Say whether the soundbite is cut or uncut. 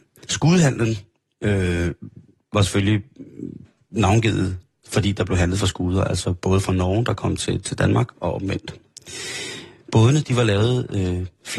uncut